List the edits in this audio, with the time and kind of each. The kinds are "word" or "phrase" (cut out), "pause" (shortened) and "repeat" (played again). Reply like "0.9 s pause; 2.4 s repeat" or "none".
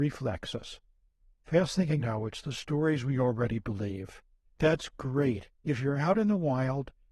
2.0 s phrase; 4.4 s pause